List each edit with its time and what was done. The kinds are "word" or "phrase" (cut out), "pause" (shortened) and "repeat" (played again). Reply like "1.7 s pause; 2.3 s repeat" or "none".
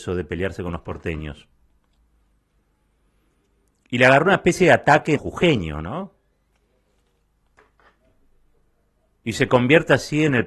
5.2 s word